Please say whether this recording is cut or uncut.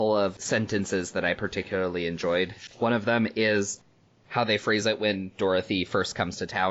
uncut